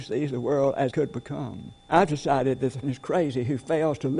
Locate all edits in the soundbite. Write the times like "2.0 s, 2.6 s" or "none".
0.9 s, 1.8 s, 2.8 s